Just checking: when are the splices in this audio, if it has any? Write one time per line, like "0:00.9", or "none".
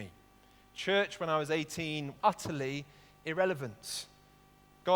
0:02.1